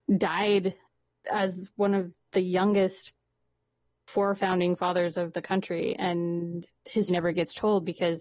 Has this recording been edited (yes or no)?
yes